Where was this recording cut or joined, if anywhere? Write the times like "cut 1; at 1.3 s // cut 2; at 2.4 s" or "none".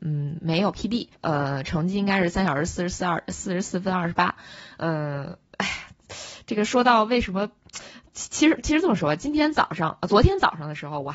cut 1; at 1.1 s // cut 2; at 5.5 s